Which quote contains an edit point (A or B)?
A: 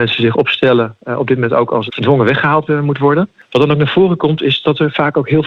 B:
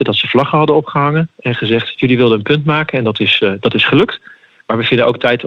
A